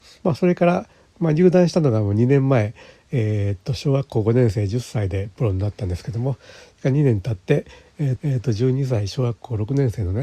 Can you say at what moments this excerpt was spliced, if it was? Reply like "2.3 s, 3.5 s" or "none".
8.2 s